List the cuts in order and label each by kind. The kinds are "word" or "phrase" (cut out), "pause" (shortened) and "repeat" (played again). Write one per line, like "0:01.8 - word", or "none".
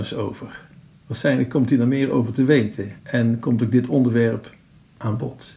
0:03.0 - pause